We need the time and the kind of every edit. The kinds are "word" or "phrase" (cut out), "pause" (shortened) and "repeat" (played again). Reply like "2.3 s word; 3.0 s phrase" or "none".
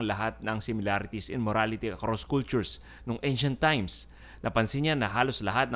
none